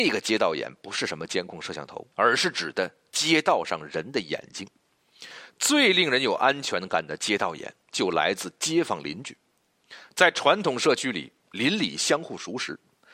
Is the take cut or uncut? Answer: cut